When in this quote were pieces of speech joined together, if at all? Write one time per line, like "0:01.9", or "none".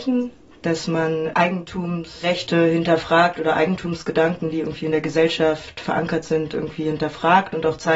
none